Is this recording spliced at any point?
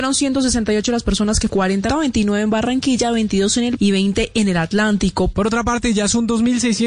yes; 3 cuts; at 1.5 s, 1.9 s, 3.8 s

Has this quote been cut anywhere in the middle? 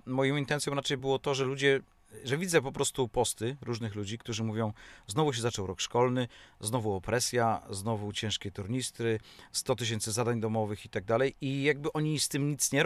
no; 0 cuts

